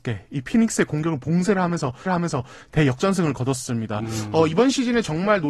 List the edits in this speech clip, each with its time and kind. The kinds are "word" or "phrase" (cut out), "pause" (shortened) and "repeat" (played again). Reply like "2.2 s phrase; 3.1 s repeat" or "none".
2.1 s repeat